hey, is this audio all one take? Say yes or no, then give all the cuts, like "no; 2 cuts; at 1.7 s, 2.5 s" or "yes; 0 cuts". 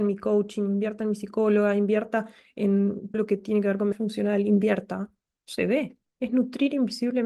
no; 2 cuts; at 3.1 s, 3.9 s